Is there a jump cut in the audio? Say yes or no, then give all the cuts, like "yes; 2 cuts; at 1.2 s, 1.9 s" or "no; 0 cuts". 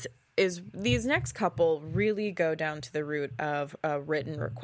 no; 0 cuts